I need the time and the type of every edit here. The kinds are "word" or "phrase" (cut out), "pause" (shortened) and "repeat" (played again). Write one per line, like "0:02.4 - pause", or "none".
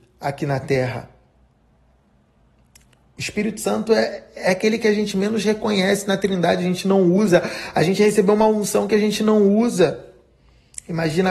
none